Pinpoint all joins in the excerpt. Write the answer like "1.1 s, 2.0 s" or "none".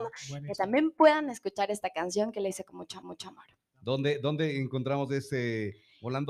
3.0 s